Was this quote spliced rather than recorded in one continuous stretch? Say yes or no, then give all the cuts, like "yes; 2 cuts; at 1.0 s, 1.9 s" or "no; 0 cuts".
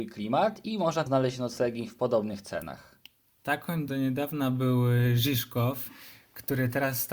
yes; 2 cuts; at 1.1 s, 3.9 s